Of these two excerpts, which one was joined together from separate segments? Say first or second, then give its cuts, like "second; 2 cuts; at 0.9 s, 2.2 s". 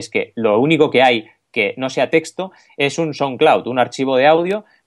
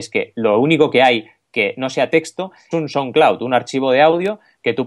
second; 1 cut; at 2.7 s